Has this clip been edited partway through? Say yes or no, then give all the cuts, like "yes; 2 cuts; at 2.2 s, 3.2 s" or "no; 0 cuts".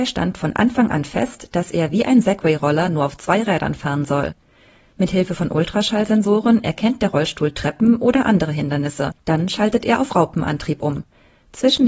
no; 0 cuts